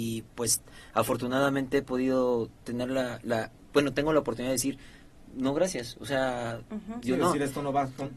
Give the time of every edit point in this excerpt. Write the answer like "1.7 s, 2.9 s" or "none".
none